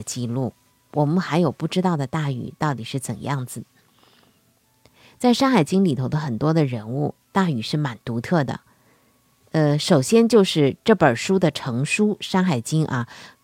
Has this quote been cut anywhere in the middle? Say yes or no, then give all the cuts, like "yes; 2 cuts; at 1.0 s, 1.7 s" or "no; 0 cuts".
no; 0 cuts